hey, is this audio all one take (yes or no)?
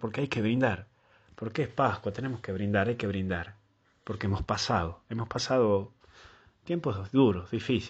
yes